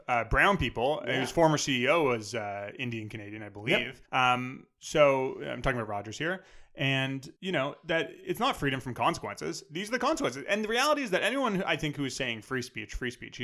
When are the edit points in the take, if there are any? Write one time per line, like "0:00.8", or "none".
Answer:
0:04.1
0:07.4